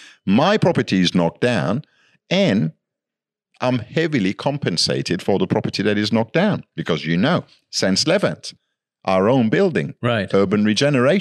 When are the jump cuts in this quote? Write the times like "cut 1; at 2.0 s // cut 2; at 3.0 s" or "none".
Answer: none

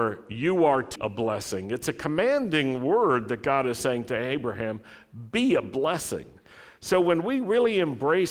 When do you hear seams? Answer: cut 1; at 1.0 s

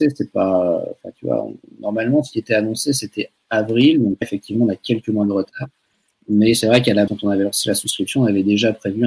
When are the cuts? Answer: cut 1; at 4.2 s // cut 2; at 7.1 s

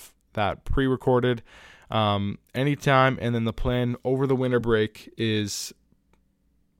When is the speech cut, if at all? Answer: none

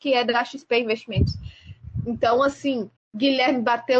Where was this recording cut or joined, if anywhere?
cut 1; at 3.0 s

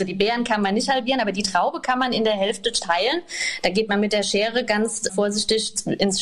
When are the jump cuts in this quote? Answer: cut 1; at 5.1 s

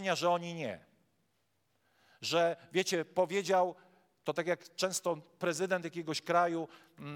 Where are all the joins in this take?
none

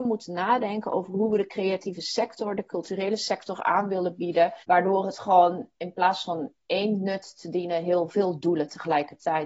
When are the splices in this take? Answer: cut 1; at 4.6 s

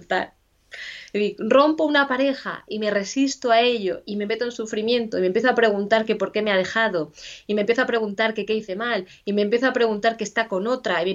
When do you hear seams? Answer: none

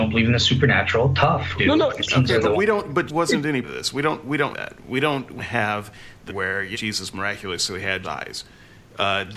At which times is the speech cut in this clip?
cut 1; at 1.6 s // cut 2; at 3.1 s // cut 3; at 3.6 s // cut 4; at 4.5 s // cut 5; at 5.4 s // cut 6; at 6.3 s // cut 7; at 6.7 s // cut 8; at 8.0 s

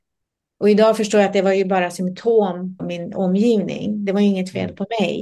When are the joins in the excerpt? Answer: cut 1; at 2.8 s

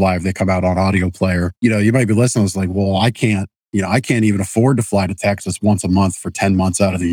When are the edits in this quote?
cut 1; at 1.6 s

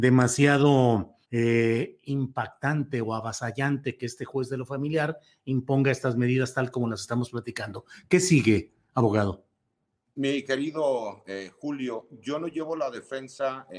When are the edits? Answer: cut 1; at 1.2 s

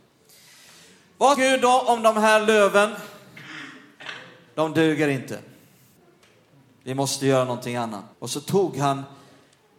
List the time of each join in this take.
cut 1; at 1.3 s // cut 2; at 6.0 s // cut 3; at 8.1 s

